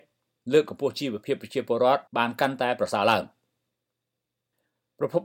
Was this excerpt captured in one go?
no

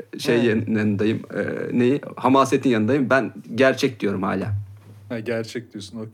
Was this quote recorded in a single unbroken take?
yes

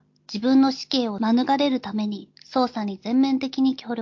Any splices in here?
yes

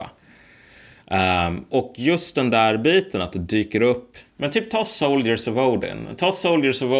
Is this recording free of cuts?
no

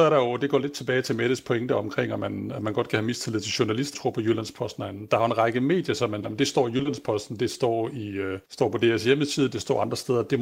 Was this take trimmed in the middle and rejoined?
yes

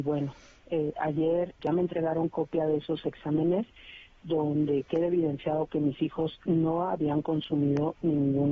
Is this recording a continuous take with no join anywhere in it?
no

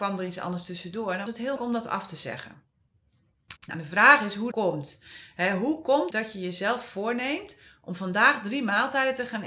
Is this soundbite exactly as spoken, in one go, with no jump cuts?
no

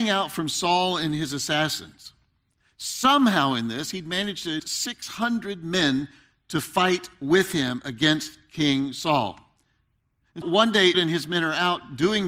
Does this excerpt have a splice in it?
yes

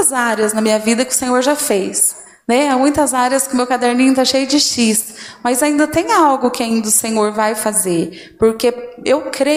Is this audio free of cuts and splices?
yes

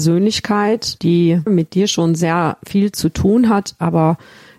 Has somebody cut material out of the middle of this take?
no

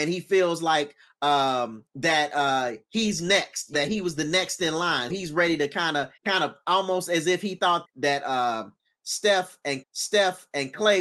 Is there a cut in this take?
yes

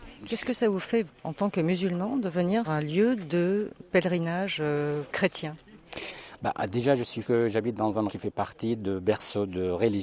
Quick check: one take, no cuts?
no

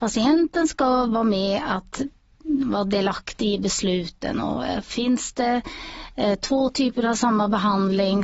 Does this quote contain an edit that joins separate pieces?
no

